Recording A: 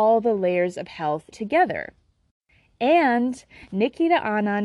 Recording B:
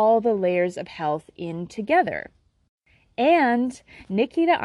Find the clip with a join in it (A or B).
A